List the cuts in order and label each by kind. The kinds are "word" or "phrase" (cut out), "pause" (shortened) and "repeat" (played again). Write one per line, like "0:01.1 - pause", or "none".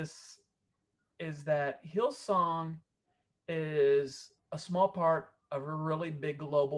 none